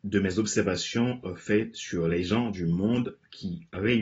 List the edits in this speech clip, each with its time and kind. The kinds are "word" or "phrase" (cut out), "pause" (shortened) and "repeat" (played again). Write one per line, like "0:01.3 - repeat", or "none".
none